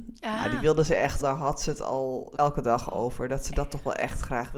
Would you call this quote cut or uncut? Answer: cut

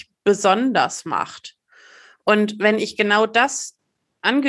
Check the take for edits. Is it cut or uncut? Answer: uncut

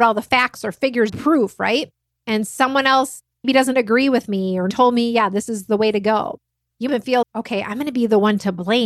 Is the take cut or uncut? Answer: cut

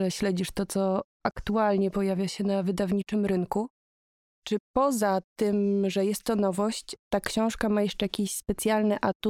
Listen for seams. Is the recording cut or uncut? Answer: uncut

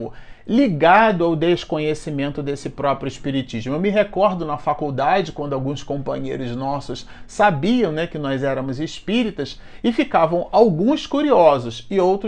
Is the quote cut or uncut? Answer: uncut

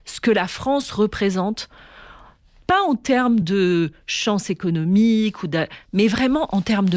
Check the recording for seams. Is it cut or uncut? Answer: uncut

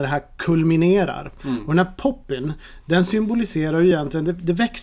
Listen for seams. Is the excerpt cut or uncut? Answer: uncut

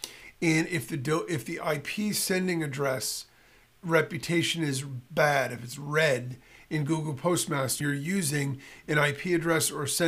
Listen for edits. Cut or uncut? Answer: cut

